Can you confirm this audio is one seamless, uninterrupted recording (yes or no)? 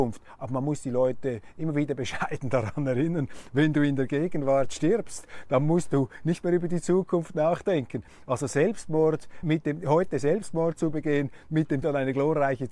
no